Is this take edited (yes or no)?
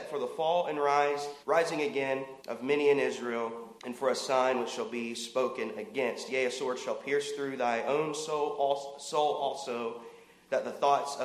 yes